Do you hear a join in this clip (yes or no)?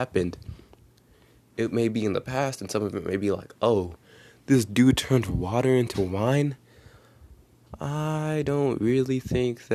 no